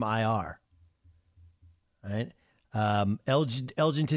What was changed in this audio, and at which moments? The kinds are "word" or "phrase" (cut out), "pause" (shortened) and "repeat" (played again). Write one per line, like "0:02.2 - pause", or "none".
none